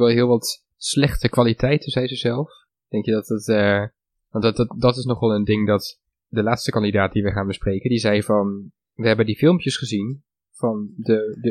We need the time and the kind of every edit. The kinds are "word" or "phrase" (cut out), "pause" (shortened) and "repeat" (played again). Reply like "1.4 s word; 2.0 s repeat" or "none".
none